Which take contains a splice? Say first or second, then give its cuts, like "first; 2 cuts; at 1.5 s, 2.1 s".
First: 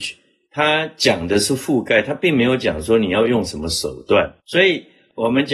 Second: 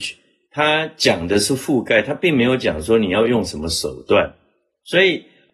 first; 1 cut; at 4.4 s